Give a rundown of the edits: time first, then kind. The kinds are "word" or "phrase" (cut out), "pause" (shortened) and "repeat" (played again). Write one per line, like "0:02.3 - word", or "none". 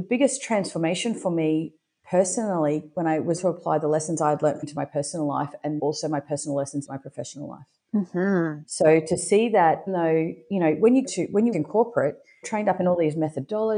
0:03.4 - word
0:04.6 - word
0:05.8 - word
0:06.8 - word
0:09.9 - word
0:11.0 - word
0:11.5 - word
0:12.4 - word